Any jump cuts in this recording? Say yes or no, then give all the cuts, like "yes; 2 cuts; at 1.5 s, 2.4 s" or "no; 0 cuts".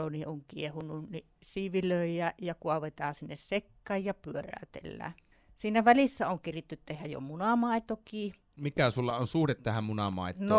yes; 1 cut; at 5.3 s